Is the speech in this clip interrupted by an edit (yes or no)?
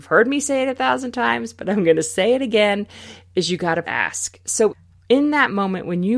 yes